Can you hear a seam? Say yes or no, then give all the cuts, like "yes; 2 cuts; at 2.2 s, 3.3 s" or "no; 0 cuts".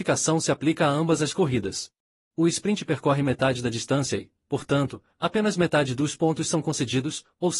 yes; 1 cut; at 2.1 s